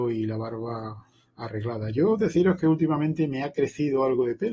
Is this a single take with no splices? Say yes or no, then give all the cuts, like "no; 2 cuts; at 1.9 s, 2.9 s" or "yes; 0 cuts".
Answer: yes; 0 cuts